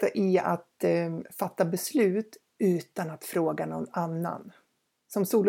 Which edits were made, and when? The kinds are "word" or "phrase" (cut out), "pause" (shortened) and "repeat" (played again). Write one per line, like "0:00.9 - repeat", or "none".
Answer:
none